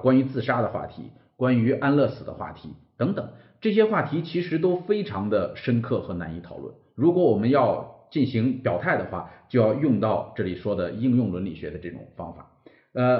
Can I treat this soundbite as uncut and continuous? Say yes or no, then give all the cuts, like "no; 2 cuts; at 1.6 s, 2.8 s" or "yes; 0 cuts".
yes; 0 cuts